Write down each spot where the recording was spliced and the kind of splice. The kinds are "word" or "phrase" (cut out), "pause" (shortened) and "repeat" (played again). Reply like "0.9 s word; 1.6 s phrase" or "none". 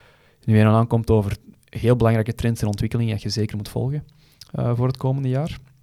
none